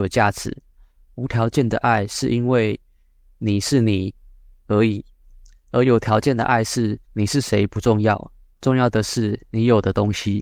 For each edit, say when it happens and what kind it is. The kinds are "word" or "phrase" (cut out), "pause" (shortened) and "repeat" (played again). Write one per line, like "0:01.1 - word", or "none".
0:07.0 - pause